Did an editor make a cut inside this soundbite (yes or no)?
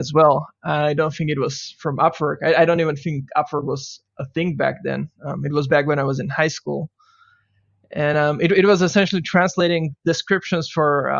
no